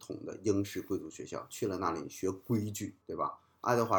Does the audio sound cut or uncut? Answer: cut